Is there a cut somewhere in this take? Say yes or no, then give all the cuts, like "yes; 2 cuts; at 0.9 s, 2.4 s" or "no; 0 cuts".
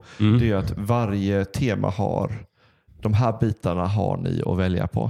no; 0 cuts